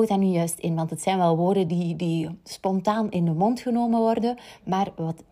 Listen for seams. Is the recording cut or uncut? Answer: uncut